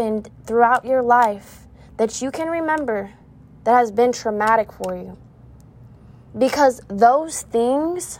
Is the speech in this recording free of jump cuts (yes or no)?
yes